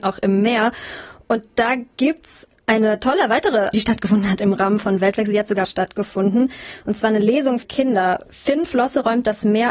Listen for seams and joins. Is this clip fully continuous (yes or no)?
no